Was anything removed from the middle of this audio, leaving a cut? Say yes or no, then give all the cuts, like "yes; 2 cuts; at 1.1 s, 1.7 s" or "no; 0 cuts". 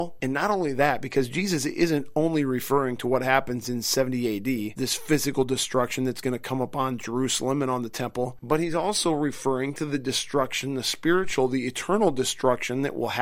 no; 0 cuts